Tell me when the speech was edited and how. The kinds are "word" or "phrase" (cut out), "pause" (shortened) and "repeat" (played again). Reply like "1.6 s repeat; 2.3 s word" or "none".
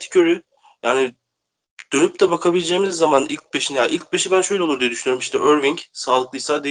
none